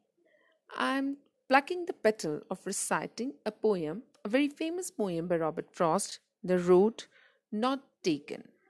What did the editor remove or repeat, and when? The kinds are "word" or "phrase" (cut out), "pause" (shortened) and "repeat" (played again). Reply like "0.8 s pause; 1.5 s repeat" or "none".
none